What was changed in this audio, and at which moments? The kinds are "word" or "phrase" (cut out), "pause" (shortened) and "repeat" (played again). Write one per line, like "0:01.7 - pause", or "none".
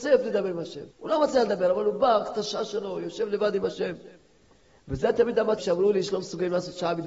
0:00.9 - pause
0:05.6 - word